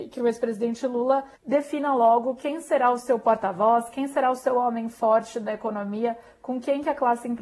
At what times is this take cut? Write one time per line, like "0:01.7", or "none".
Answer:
0:01.4